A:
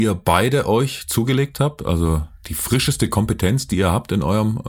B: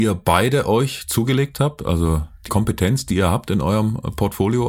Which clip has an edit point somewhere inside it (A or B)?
B